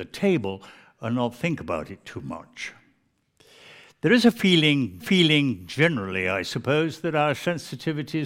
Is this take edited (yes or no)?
yes